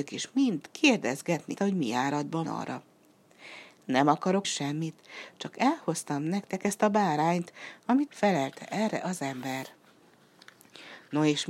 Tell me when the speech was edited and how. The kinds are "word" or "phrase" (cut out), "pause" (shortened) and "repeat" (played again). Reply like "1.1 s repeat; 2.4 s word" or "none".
1.6 s word; 2.4 s word; 4.4 s word; 8.1 s phrase